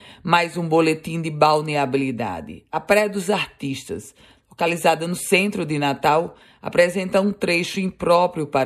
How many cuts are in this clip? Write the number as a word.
zero